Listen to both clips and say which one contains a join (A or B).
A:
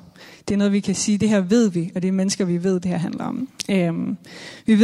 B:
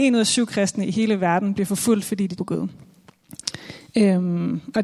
B